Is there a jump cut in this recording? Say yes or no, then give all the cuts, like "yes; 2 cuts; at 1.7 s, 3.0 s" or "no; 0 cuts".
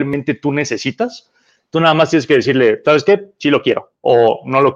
no; 0 cuts